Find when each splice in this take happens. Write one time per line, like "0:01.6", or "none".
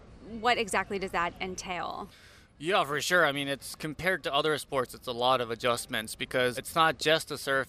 0:06.5